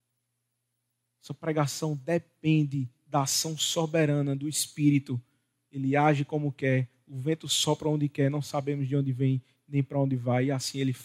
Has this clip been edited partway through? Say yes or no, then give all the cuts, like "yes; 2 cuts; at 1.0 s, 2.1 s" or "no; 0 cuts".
no; 0 cuts